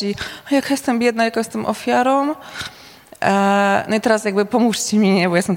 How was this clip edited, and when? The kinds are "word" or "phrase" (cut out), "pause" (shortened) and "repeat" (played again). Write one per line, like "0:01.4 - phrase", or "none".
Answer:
none